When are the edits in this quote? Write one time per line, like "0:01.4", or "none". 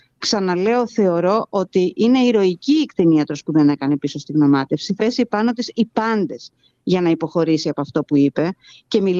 0:05.0